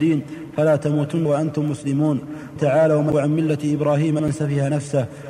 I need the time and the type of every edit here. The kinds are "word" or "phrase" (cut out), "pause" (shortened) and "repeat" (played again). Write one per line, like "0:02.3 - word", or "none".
0:01.2 - word
0:02.6 - word
0:03.1 - word
0:04.2 - word